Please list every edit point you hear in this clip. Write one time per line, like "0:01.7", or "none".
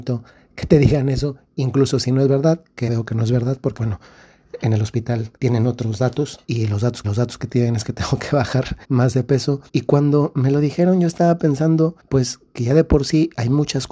0:02.9
0:03.8
0:05.4
0:06.4
0:07.0
0:08.8
0:09.7
0:12.0